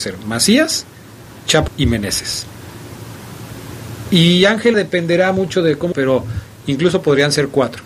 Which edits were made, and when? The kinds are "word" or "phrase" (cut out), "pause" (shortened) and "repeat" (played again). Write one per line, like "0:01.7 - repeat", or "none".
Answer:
0:01.7 - word
0:04.7 - word
0:05.9 - word